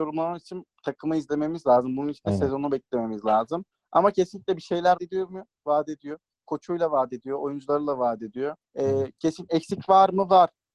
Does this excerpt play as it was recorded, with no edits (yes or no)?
no